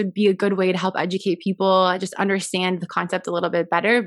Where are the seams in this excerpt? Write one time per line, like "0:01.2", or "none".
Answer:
none